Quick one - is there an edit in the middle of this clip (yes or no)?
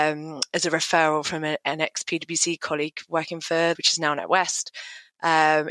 yes